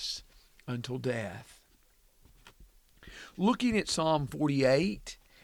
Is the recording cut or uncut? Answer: uncut